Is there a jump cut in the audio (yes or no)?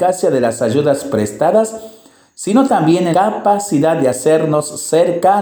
yes